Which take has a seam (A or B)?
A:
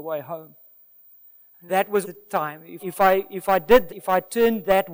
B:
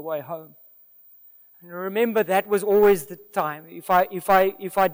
A